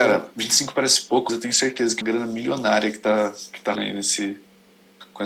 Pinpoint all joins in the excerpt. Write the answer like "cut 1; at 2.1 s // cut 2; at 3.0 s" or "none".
cut 1; at 1.3 s // cut 2; at 2.0 s // cut 3; at 3.8 s